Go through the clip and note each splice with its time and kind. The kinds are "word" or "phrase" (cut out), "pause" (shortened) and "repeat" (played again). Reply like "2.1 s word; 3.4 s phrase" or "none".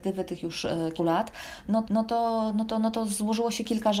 1.0 s word; 1.8 s repeat